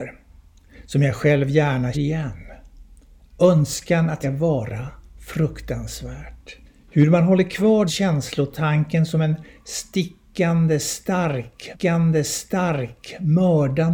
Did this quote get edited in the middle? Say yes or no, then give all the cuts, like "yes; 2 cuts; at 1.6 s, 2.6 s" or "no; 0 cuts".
yes; 5 cuts; at 1.9 s, 4.2 s, 6.6 s, 7.9 s, 11.7 s